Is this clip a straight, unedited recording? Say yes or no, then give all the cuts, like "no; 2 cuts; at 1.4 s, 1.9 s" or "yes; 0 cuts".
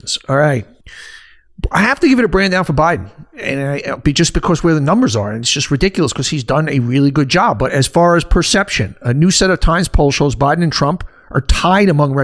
yes; 0 cuts